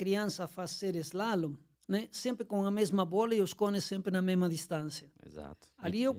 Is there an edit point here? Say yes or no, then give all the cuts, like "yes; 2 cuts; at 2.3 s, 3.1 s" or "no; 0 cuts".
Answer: yes; 2 cuts; at 1.7 s, 5.2 s